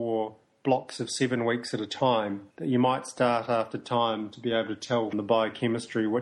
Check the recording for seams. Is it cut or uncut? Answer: cut